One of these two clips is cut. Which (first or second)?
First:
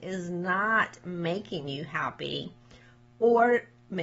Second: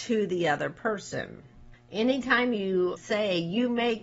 second